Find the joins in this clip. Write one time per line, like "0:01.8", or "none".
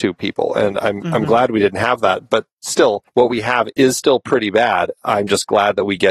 0:03.1